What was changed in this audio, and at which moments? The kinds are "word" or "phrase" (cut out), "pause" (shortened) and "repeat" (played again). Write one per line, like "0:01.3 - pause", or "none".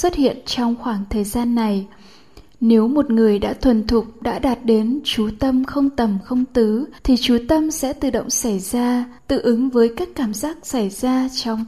0:07.0 - pause
0:09.2 - pause